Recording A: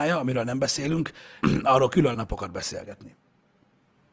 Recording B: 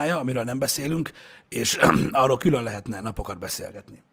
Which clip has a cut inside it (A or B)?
A